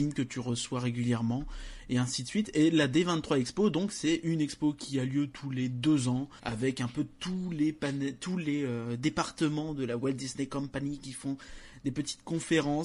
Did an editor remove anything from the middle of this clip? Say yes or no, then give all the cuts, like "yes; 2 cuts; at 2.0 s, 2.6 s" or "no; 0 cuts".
yes; 1 cut; at 6.4 s